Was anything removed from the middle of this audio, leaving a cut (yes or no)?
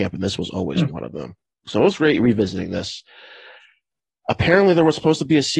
no